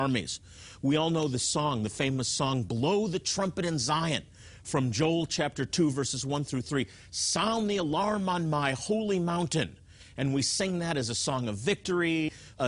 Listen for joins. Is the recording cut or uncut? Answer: uncut